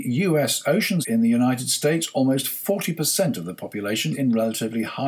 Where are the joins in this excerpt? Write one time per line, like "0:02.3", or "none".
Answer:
0:01.0
0:04.1

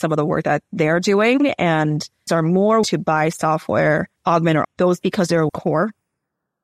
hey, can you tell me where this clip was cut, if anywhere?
0:02.3
0:02.8
0:04.2
0:04.6
0:05.0
0:05.5

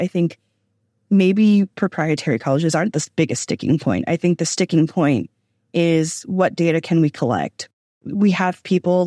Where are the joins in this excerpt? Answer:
none

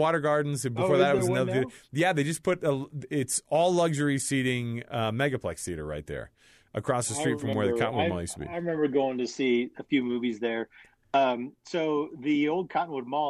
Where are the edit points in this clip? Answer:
none

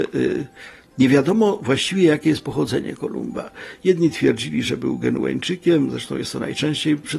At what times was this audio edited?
none

